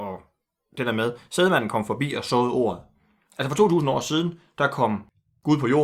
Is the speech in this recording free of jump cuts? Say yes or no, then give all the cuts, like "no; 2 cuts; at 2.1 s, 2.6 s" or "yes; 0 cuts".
yes; 0 cuts